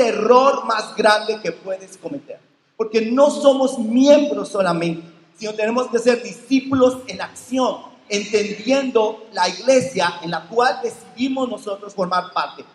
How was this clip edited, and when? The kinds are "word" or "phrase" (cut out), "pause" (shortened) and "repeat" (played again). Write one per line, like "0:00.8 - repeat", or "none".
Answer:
none